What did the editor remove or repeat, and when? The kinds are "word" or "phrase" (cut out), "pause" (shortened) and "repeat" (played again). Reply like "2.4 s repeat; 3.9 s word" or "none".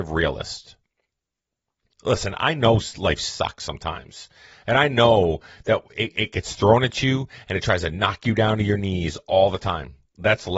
none